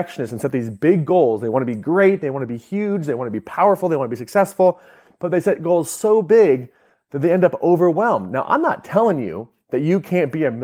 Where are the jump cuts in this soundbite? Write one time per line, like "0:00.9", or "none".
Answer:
none